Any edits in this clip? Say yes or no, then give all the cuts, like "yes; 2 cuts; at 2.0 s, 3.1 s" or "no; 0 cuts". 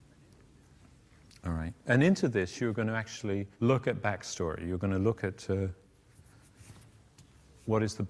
yes; 2 cuts; at 1.8 s, 3.5 s